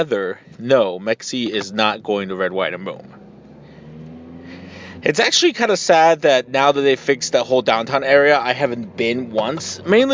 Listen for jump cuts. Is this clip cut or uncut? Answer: uncut